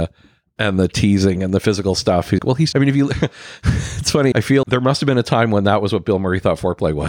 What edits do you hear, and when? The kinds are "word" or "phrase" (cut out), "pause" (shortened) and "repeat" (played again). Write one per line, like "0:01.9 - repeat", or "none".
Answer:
0:02.4 - word
0:02.7 - word
0:04.3 - word
0:04.6 - word